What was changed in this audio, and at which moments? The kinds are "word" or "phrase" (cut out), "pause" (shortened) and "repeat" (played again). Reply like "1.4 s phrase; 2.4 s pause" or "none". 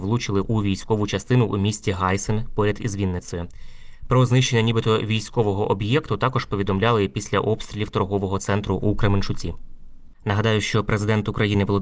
none